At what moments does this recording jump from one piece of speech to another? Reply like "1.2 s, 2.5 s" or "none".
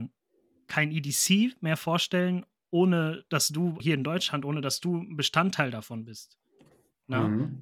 3.8 s